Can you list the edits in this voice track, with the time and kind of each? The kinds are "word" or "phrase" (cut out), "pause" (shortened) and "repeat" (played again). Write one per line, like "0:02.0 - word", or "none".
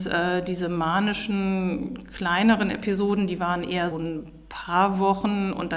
0:03.9 - word